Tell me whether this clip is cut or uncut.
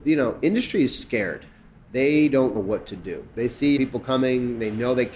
cut